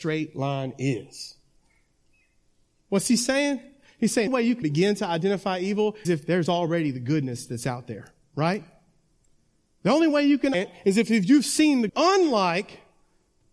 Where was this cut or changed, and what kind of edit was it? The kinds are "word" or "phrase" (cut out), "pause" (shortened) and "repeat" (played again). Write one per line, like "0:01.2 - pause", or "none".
0:04.3 - phrase
0:04.6 - word
0:06.0 - word
0:10.5 - word
0:11.9 - word